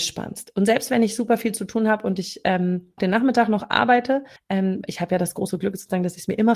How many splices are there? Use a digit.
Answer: 2